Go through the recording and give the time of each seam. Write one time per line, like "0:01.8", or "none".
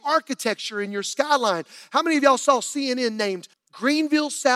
0:03.5